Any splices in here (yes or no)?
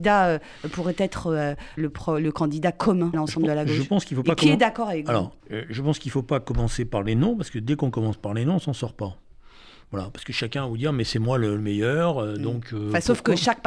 yes